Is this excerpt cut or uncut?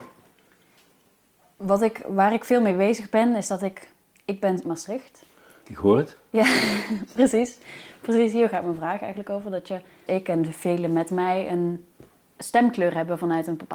cut